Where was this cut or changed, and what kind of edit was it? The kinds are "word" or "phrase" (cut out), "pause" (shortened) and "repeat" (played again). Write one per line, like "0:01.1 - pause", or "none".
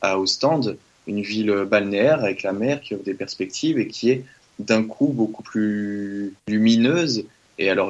0:06.4 - pause